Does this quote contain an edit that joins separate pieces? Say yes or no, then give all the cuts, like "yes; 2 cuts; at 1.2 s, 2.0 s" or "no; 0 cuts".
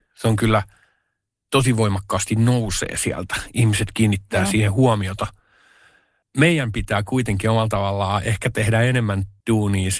no; 0 cuts